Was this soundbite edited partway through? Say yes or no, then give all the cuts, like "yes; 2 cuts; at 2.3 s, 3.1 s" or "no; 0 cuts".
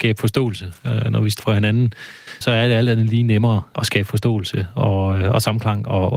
yes; 3 cuts; at 1.4 s, 2.4 s, 3.7 s